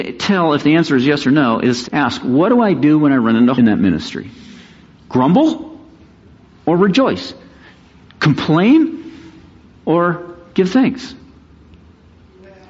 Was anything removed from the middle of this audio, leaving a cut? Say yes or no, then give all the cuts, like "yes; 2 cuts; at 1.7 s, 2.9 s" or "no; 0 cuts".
yes; 2 cuts; at 1.8 s, 3.6 s